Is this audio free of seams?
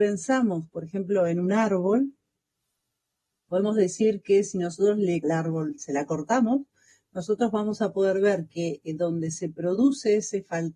no; 1 cut; at 5.2 s

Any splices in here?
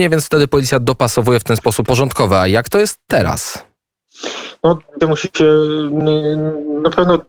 yes; 2 cuts; at 1.8 s, 5.0 s

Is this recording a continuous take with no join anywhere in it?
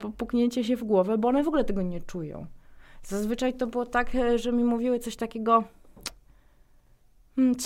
yes; 0 cuts

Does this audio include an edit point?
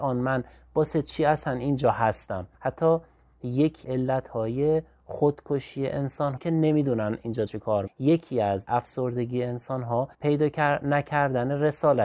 yes; 7 cuts; at 2.5 s, 3.8 s, 6.4 s, 7.5 s, 7.9 s, 8.7 s, 10.1 s

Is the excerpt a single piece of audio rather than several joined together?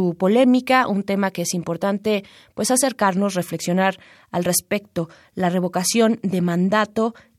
yes; 0 cuts

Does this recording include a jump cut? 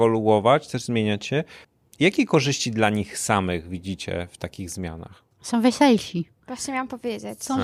yes; 2 cuts; at 1.6 s, 5.3 s

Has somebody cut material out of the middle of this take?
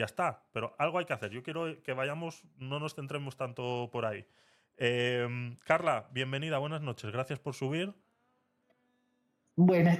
no; 0 cuts

